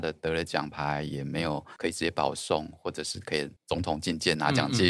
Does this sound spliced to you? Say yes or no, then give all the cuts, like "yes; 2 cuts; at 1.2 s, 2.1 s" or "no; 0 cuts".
yes; 1 cut; at 3.6 s